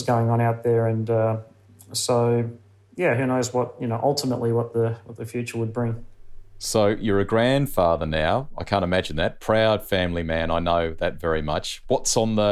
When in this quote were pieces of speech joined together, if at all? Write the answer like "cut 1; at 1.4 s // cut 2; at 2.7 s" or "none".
none